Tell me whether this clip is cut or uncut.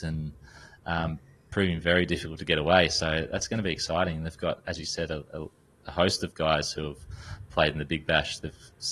uncut